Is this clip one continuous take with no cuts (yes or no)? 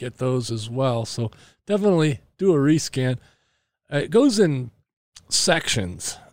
yes